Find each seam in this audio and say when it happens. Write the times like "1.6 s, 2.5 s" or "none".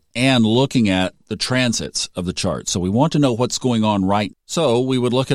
4.3 s